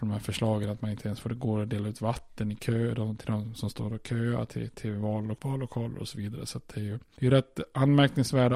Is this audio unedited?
yes; 0 cuts

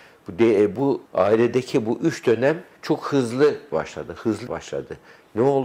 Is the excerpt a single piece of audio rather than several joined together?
no; 4 cuts; at 1.1 s, 2.8 s, 3.7 s, 4.5 s

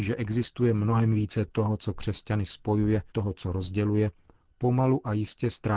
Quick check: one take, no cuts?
no; 1 cut; at 3.1 s

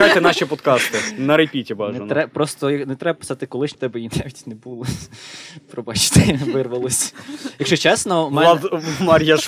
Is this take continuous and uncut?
no; 1 cut; at 3.7 s

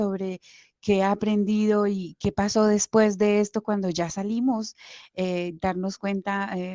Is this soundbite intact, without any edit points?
yes; 0 cuts

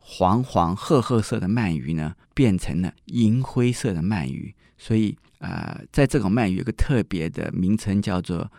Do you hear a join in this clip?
yes; 3 cuts; at 2.2 s, 3.0 s, 5.3 s

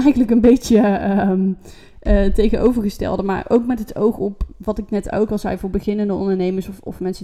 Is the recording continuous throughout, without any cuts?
yes; 0 cuts

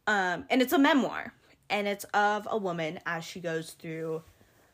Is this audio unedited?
yes; 0 cuts

